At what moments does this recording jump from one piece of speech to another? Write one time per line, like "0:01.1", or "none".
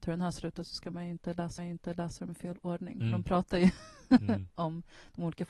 0:01.6